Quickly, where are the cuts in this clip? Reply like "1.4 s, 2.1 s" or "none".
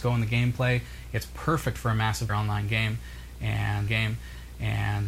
2.3 s, 3.9 s